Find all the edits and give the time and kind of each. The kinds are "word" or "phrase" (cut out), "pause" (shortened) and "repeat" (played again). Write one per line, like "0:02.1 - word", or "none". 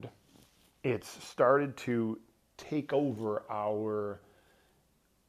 none